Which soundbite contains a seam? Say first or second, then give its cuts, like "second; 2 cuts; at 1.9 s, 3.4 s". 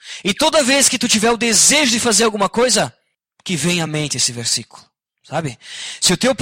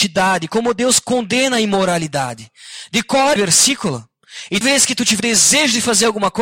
second; 3 cuts; at 3.4 s, 4.6 s, 5.2 s